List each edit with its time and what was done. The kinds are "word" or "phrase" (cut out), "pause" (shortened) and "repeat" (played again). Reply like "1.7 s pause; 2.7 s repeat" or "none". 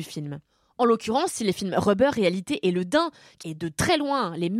3.4 s phrase